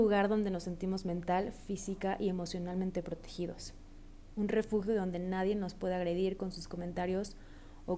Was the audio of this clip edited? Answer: no; 0 cuts

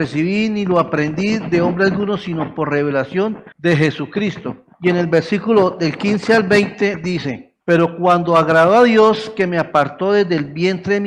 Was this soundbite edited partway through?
yes; 3 cuts; at 3.5 s, 4.7 s, 7.6 s

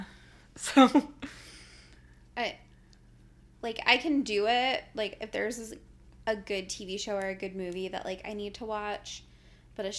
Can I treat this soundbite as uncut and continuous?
yes; 0 cuts

